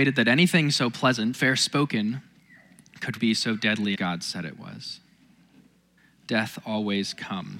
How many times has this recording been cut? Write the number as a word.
four